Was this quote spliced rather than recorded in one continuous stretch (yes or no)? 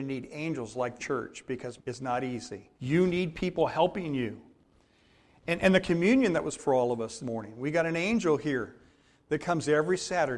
yes